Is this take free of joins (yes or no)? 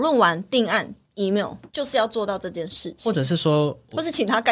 no